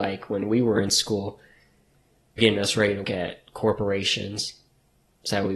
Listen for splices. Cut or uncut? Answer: cut